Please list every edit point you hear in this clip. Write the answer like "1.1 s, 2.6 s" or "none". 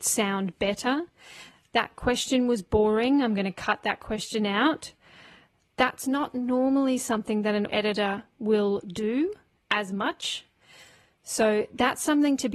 7.7 s